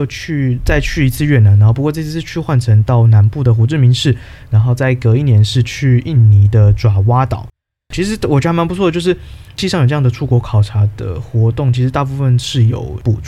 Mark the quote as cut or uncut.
uncut